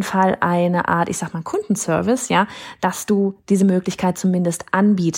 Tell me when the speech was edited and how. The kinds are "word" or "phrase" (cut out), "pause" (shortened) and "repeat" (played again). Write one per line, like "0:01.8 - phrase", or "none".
none